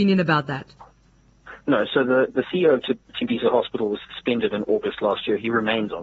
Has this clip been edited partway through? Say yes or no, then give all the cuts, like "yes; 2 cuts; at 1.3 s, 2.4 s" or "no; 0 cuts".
no; 0 cuts